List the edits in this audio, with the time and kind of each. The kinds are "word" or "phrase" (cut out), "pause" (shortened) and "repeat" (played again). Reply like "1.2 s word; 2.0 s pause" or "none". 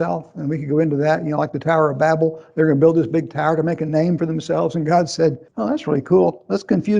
5.5 s pause